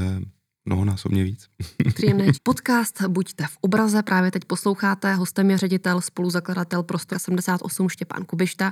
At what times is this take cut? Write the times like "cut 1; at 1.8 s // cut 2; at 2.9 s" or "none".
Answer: cut 1; at 2.3 s // cut 2; at 7.1 s